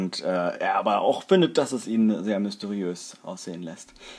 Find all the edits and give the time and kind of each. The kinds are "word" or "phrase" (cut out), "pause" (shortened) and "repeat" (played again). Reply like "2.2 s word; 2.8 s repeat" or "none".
none